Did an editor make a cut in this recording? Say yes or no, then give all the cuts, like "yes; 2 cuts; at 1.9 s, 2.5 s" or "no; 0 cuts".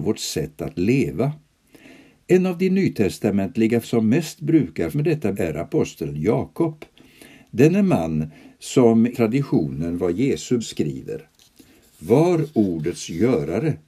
yes; 5 cuts; at 3.8 s, 4.9 s, 5.3 s, 9.1 s, 10.6 s